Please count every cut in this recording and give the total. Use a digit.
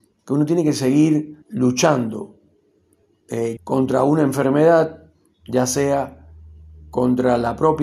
2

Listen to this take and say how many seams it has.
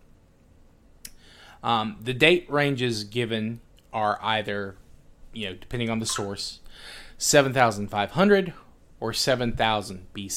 0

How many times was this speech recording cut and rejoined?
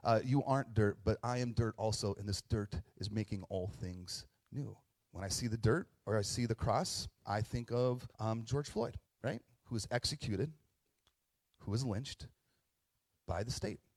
3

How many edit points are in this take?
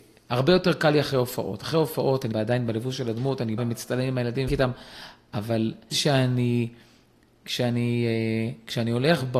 4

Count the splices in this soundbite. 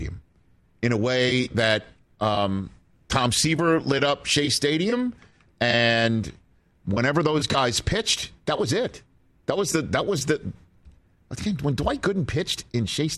0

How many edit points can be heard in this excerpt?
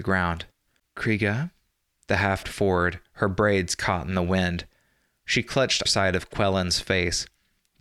2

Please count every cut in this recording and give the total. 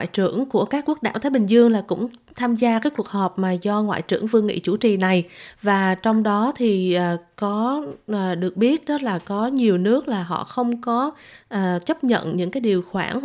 0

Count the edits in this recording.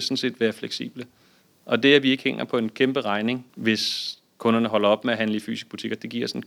1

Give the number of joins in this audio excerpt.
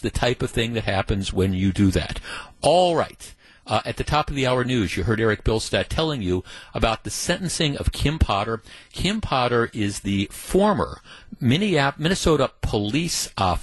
0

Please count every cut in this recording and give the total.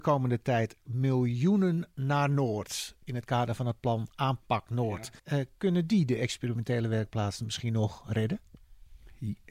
1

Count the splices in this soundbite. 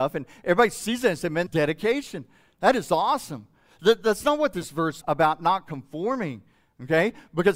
2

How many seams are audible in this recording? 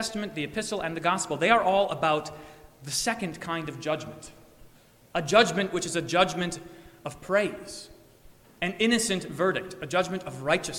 0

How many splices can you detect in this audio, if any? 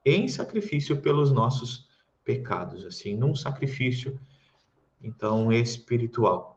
0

